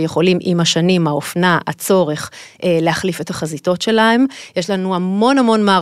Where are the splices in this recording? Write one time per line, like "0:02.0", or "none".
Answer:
none